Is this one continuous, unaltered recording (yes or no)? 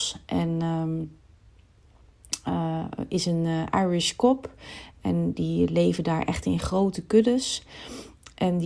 yes